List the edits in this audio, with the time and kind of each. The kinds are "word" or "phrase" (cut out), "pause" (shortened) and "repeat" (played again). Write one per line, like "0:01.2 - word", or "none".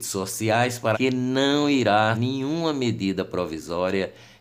0:00.9 - word
0:02.1 - word